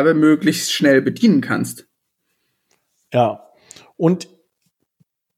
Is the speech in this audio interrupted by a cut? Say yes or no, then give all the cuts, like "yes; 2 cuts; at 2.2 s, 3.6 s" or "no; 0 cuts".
no; 0 cuts